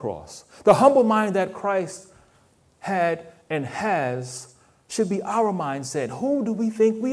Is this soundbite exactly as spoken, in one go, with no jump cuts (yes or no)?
yes